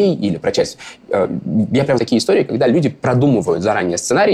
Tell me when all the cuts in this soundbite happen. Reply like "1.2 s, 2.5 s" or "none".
2.0 s